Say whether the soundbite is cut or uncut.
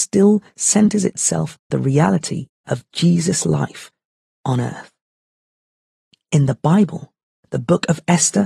cut